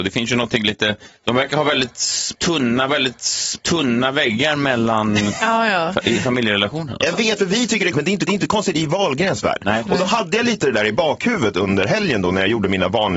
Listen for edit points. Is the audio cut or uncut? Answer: cut